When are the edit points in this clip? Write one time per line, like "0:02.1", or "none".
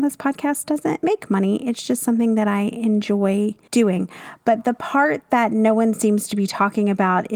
0:03.7